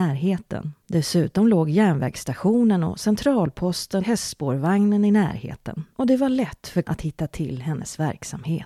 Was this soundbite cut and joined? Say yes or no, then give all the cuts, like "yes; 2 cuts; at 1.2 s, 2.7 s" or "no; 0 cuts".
yes; 3 cuts; at 4.0 s, 5.9 s, 6.8 s